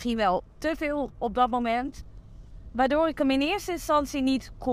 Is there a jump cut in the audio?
no; 0 cuts

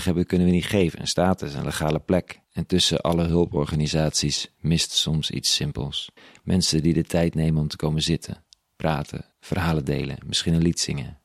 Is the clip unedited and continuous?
no; 3 cuts; at 2.4 s, 6.2 s, 9.3 s

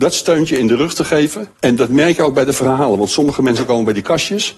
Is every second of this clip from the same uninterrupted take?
no; 1 cut; at 1.5 s

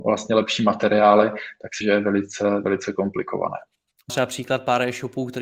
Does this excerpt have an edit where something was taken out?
yes; 2 cuts; at 1.8 s, 4.1 s

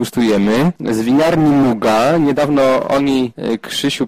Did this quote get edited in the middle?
no; 0 cuts

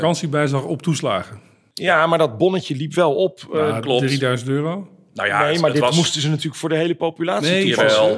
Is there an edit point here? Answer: no; 0 cuts

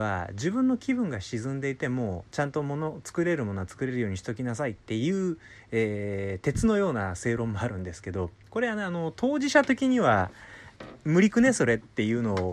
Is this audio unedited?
yes; 0 cuts

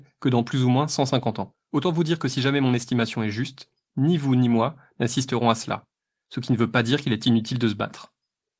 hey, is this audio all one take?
yes; 0 cuts

